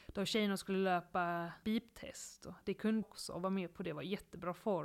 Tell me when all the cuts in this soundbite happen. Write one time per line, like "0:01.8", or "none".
0:01.6
0:03.0